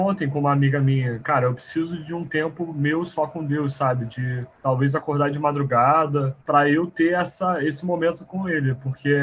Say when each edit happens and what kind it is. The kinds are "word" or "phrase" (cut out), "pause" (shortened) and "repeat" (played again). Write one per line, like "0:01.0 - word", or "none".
0:04.5 - pause
0:06.4 - pause

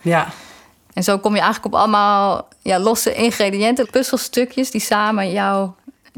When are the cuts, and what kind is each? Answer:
0:03.8 - word

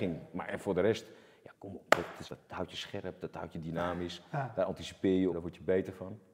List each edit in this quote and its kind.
0:01.5 - word
0:02.2 - word
0:05.3 - word

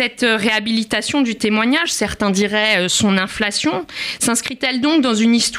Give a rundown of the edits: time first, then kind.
none

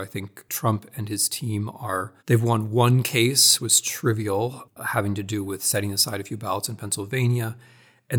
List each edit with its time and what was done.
0:02.2 - pause
0:03.6 - word

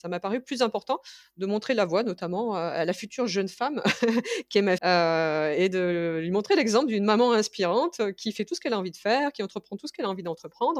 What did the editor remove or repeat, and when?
0:04.8 - word

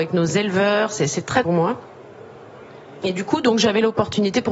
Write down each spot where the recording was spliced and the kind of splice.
0:01.4 - phrase

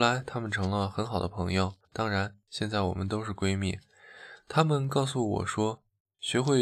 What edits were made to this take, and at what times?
0:01.8 - pause

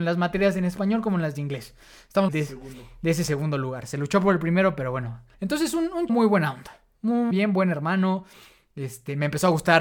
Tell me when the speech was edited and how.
0:02.3 - phrase
0:05.3 - pause
0:06.1 - word
0:07.3 - word

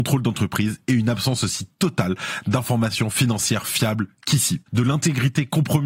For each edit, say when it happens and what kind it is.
none

